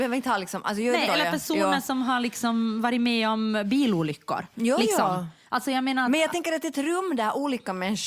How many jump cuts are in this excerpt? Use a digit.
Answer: 1